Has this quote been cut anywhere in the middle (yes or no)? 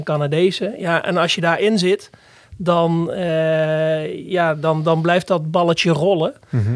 no